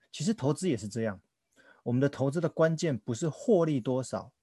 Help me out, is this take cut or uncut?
uncut